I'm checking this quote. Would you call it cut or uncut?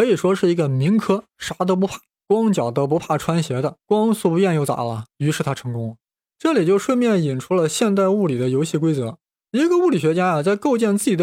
cut